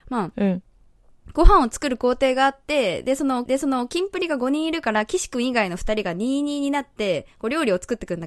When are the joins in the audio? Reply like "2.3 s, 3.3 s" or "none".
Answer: 3.5 s